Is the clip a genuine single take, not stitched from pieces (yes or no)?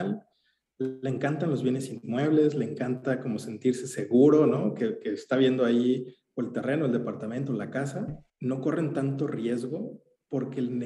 no